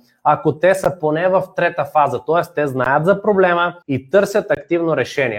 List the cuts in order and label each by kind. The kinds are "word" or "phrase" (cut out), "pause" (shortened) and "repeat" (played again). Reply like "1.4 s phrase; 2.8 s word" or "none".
3.8 s pause